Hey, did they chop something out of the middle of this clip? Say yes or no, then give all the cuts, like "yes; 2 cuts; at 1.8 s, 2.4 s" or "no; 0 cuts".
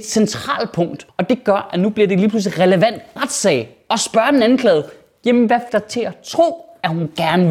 yes; 3 cuts; at 1.1 s, 3.2 s, 5.7 s